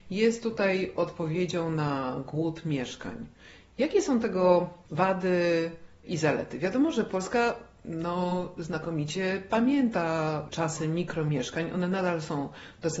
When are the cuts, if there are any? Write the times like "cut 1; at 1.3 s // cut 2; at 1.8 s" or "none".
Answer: cut 1; at 4.8 s